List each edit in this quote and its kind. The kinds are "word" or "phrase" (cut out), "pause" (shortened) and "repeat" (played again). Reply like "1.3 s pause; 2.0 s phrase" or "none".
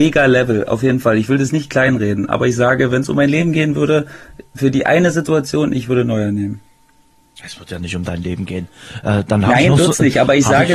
none